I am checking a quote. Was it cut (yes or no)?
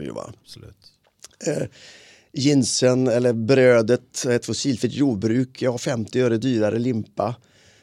no